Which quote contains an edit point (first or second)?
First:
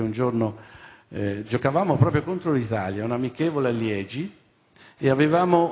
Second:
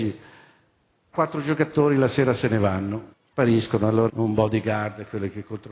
second